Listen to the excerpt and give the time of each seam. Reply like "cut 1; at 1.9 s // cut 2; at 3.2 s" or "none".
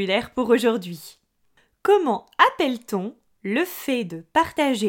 none

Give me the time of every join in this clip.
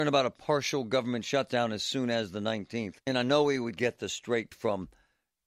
cut 1; at 3.0 s // cut 2; at 4.5 s

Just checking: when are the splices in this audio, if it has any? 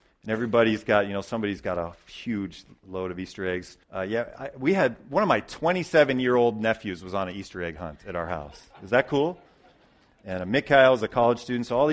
cut 1; at 3.8 s

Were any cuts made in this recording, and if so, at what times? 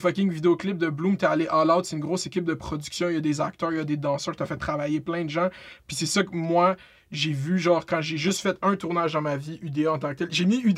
none

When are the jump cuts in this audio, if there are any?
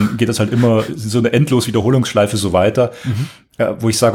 none

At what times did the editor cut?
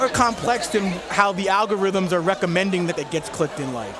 cut 1; at 2.9 s

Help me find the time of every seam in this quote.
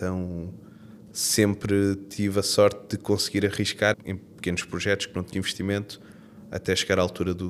cut 1; at 3.9 s // cut 2; at 5.3 s

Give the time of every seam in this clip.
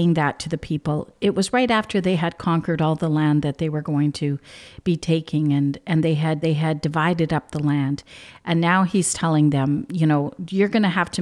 cut 1; at 6.4 s

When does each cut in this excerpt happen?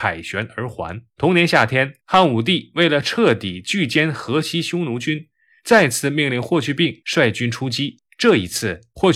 cut 1; at 1.1 s // cut 2; at 2.0 s // cut 3; at 8.1 s

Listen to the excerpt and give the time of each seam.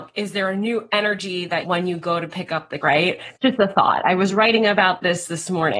cut 1; at 1.6 s // cut 2; at 2.8 s // cut 3; at 3.4 s

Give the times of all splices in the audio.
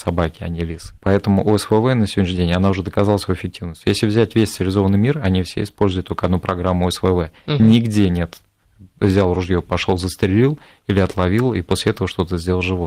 cut 1; at 1.0 s

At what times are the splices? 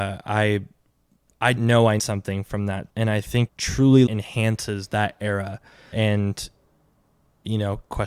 cut 1; at 1.6 s // cut 2; at 2.0 s // cut 3; at 2.9 s // cut 4; at 3.5 s // cut 5; at 4.1 s // cut 6; at 5.9 s

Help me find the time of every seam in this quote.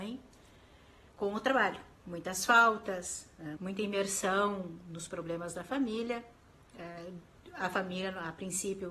cut 1; at 2.0 s // cut 2; at 3.6 s

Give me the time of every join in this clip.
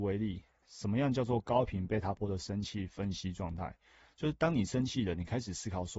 none

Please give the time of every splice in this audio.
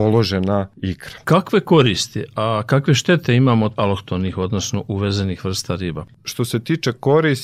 cut 1; at 3.8 s

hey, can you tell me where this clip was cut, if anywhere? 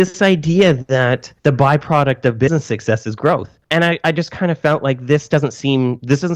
cut 1; at 1.4 s // cut 2; at 3.6 s

